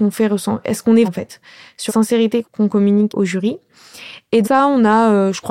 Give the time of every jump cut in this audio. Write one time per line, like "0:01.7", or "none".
0:01.0
0:01.9
0:02.4
0:03.1
0:04.4